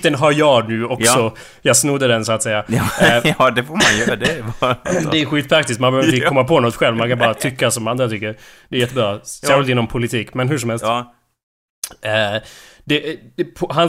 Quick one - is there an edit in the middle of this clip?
no; 0 cuts

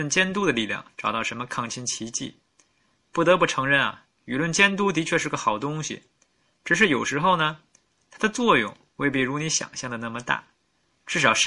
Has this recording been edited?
no; 0 cuts

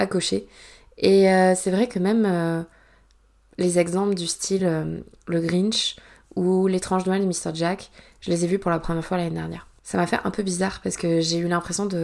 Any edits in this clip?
no; 0 cuts

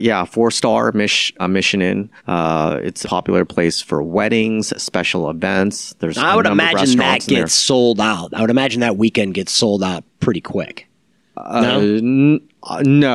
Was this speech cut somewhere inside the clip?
yes; 4 cuts; at 1.4 s, 2.2 s, 3.0 s, 11.1 s

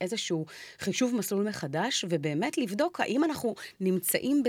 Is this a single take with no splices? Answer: yes; 0 cuts

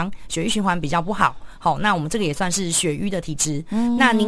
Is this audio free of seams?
yes; 0 cuts

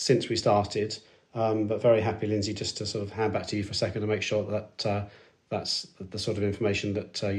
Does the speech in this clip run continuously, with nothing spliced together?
yes; 0 cuts

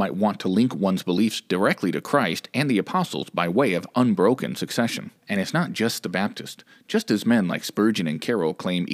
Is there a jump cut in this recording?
no; 0 cuts

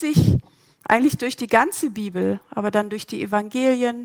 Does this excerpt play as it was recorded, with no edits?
yes; 0 cuts

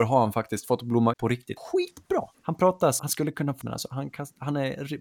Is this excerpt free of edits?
no; 5 cuts; at 1.1 s, 1.6 s, 2.3 s, 3.0 s, 3.6 s

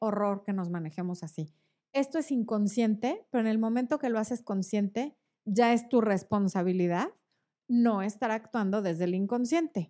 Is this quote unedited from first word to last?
yes; 0 cuts

